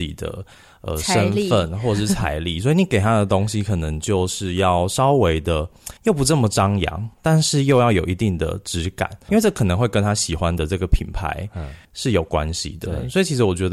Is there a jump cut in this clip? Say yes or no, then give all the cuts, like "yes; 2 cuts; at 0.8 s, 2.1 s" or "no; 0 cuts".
yes; 4 cuts; at 6.0 s, 7.1 s, 9.3 s, 11.8 s